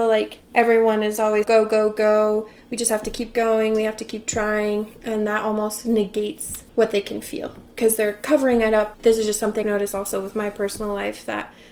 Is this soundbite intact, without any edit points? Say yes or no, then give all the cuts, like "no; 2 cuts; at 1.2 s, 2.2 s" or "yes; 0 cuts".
no; 5 cuts; at 1.4 s, 4.9 s, 6.7 s, 8.9 s, 9.6 s